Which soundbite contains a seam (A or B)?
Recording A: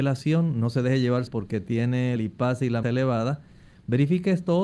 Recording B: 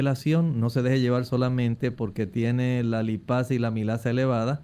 A